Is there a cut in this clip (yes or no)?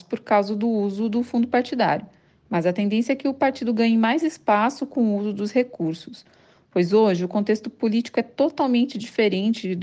no